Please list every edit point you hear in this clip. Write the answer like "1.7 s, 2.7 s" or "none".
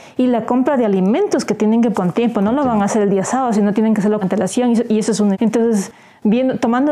1.9 s, 4.2 s, 5.3 s

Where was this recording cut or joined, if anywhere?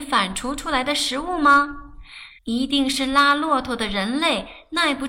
2.4 s

